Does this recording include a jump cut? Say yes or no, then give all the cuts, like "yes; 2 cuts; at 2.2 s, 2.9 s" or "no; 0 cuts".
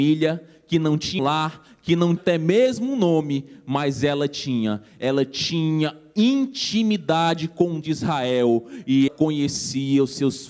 yes; 4 cuts; at 1.2 s, 2.2 s, 7.8 s, 9.1 s